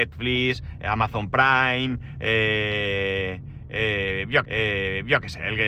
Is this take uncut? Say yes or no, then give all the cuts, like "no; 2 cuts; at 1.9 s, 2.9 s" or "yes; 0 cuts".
no; 1 cut; at 4.5 s